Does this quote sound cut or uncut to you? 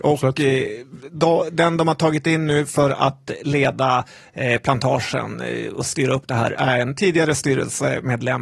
uncut